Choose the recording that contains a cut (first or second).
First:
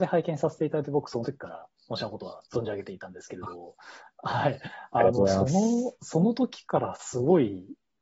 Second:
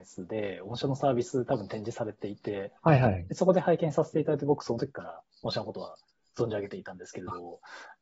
first